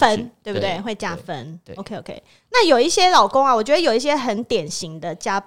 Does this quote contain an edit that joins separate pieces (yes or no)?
no